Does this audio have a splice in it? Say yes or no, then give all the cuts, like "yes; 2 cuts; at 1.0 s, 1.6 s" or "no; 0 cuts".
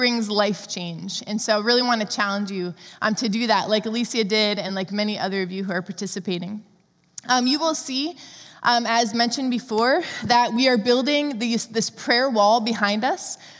no; 0 cuts